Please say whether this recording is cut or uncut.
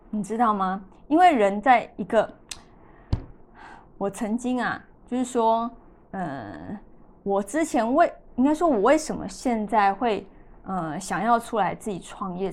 uncut